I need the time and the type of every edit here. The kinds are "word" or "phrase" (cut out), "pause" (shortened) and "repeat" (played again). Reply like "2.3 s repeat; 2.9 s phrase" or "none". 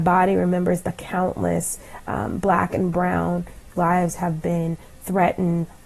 3.7 s phrase